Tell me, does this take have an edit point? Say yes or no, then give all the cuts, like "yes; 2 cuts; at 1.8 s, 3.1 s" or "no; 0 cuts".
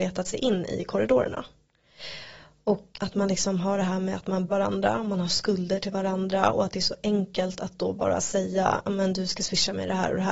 yes; 2 cuts; at 2.9 s, 4.5 s